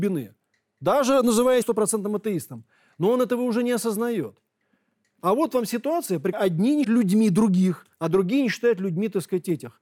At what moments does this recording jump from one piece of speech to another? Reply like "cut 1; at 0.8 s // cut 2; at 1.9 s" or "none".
cut 1; at 1.6 s // cut 2; at 6.3 s // cut 3; at 6.8 s // cut 4; at 7.9 s